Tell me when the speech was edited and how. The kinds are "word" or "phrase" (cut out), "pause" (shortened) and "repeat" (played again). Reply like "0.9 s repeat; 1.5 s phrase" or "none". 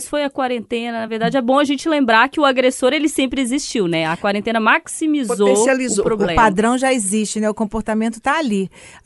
none

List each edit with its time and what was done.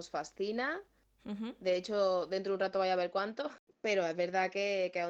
none

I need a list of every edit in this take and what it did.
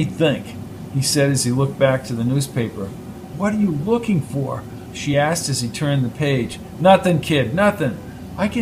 none

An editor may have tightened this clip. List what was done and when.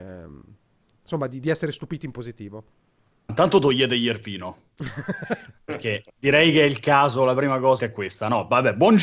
3.3 s word; 6.1 s pause; 7.8 s word

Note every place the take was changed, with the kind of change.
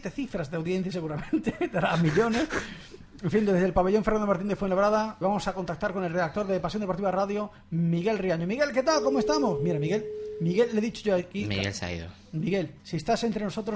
5.2 s word; 12.8 s pause

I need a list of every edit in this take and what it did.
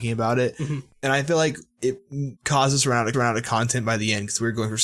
2.4 s pause; 3.1 s repeat

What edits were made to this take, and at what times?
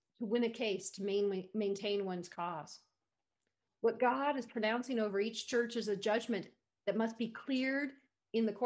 none

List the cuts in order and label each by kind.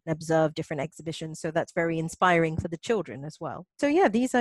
none

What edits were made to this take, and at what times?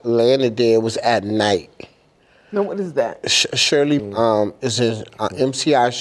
4.0 s word

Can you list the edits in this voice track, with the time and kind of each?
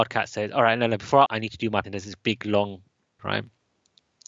1.3 s word; 1.8 s word; 3.2 s phrase

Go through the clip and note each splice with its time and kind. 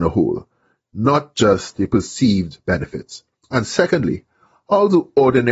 3.4 s pause

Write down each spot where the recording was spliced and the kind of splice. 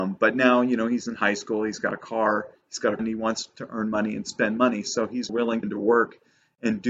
3.0 s word; 5.3 s phrase; 5.6 s phrase

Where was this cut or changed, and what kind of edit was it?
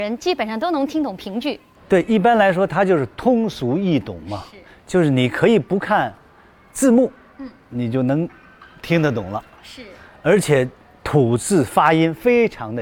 none

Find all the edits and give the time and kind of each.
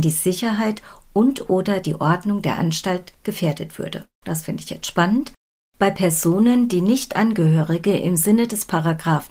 none

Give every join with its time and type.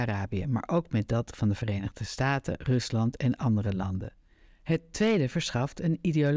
none

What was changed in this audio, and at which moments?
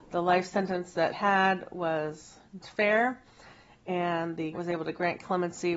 1.1 s word; 2.6 s word; 4.5 s word

